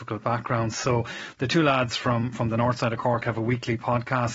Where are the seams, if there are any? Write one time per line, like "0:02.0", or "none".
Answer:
none